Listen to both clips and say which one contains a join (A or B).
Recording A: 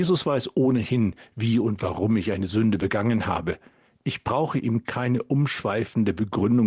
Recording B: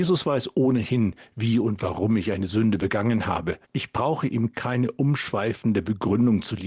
B